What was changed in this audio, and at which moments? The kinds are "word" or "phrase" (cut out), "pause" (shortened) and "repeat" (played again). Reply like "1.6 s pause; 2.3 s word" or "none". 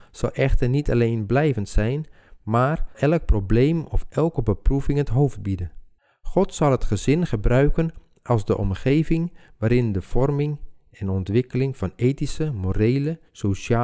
2.9 s word; 6.0 s pause